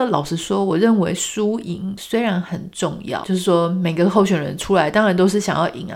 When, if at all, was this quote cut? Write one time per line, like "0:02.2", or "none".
0:03.2